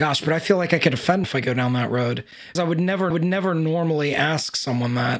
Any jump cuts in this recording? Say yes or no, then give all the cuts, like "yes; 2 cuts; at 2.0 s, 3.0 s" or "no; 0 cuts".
yes; 3 cuts; at 1.2 s, 2.5 s, 3.1 s